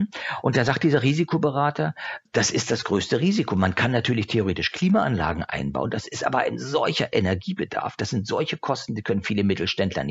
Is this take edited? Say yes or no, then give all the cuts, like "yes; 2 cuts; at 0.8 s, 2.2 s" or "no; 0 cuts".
no; 0 cuts